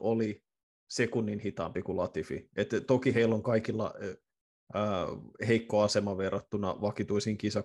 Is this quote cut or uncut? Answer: uncut